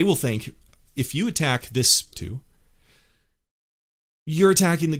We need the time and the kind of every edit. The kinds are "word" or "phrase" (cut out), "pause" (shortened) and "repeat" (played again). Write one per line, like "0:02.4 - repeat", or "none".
0:02.1 - phrase